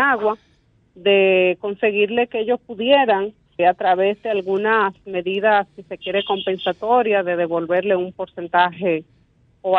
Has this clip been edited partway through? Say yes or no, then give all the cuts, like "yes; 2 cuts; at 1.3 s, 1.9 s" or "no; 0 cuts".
yes; 1 cut; at 3.6 s